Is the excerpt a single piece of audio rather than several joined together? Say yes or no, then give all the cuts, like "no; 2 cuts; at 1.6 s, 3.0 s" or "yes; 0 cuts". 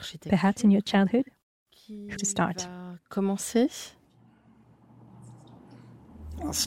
no; 1 cut; at 2.2 s